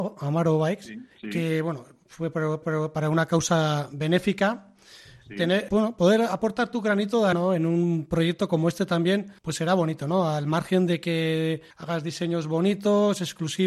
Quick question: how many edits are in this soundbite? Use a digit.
6